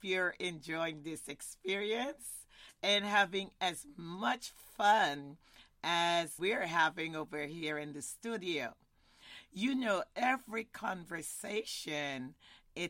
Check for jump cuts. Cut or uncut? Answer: cut